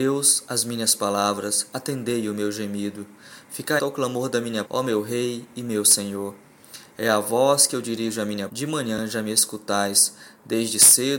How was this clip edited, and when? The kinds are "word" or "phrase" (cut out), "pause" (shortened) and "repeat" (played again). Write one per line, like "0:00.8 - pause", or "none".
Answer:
0:03.8 - word
0:04.6 - word
0:08.5 - word